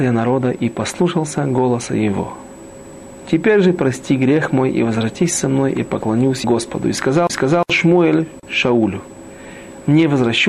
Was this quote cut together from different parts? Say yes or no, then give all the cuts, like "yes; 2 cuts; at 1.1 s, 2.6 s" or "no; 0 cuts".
yes; 2 cuts; at 6.4 s, 7.3 s